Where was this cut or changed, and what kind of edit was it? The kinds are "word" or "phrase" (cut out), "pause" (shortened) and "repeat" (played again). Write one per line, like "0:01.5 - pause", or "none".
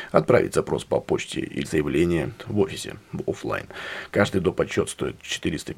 0:01.6 - phrase